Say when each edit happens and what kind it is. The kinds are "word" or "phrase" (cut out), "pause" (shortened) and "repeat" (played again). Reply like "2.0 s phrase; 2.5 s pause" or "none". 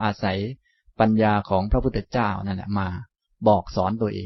none